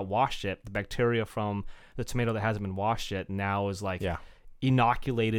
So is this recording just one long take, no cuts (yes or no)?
yes